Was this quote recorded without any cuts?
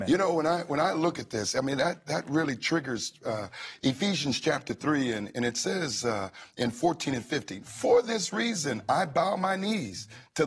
yes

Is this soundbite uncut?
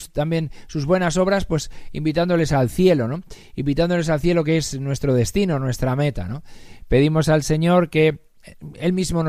yes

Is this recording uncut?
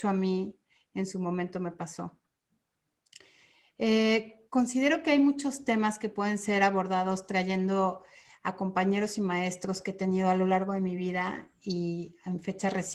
yes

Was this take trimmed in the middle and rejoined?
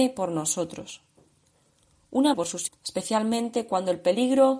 yes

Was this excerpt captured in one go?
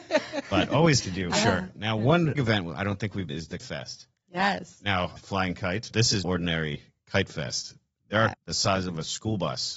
no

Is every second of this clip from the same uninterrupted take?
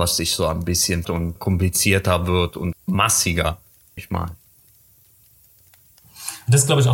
no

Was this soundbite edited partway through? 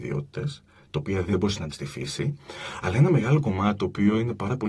yes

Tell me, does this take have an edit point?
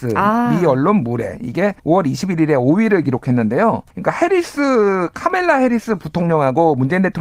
yes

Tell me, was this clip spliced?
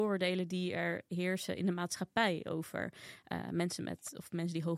no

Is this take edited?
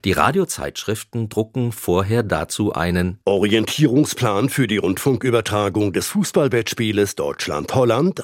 no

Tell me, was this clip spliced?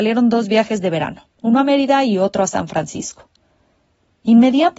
no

